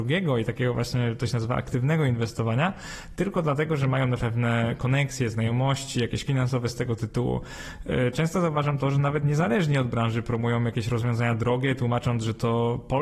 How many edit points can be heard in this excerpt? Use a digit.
2